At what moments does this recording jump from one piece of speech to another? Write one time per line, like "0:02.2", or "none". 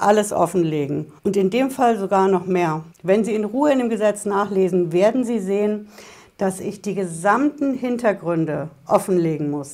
0:01.2
0:02.9